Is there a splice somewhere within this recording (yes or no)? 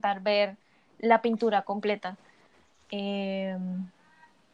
no